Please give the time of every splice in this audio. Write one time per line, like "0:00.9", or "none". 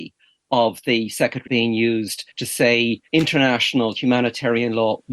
0:01.5
0:02.3
0:03.1

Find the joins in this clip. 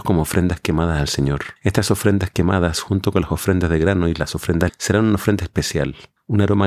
0:01.6
0:04.7

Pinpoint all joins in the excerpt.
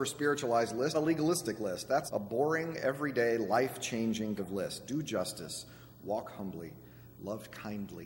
0:00.9
0:02.1
0:04.4

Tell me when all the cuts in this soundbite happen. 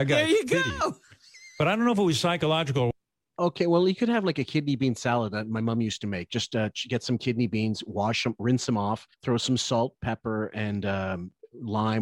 0:01.0
0:09.1

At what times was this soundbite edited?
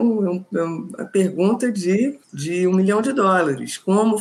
0:02.2

